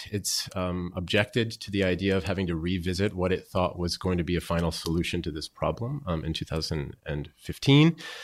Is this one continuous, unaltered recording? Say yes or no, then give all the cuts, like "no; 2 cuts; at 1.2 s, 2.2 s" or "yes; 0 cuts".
yes; 0 cuts